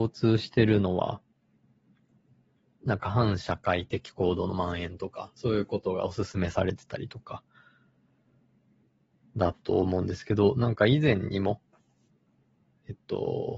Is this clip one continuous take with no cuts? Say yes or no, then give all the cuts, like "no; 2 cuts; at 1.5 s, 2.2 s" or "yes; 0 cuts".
yes; 0 cuts